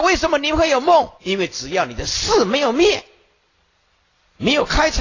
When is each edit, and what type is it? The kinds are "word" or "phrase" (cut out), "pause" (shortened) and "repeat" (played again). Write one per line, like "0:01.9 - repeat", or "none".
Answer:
0:01.2 - pause